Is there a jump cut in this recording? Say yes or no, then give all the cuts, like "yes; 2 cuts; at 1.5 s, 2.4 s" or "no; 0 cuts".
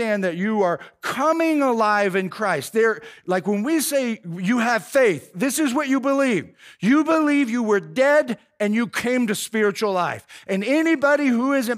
no; 0 cuts